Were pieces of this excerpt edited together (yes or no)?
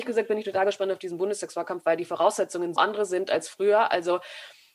yes